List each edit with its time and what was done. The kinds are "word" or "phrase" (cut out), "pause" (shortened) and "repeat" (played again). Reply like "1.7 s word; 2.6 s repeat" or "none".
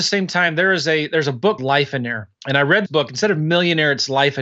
1.6 s word; 2.4 s pause; 2.9 s word